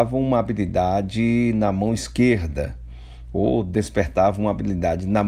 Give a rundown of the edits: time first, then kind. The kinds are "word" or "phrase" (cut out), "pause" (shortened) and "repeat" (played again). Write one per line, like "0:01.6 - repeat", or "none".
none